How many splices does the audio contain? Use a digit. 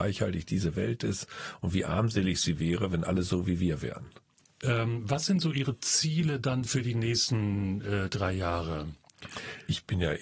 0